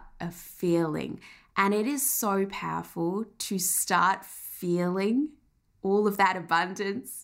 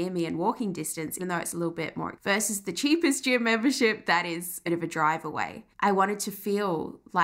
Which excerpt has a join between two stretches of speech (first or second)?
second